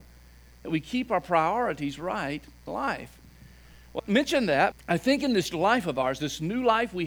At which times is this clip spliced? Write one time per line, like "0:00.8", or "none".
0:02.7
0:04.0
0:04.7
0:05.5